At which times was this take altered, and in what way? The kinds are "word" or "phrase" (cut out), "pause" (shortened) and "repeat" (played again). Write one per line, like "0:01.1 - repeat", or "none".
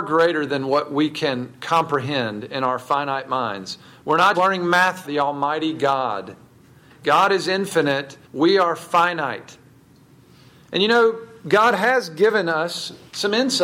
0:04.3 - word
0:05.0 - phrase
0:08.2 - pause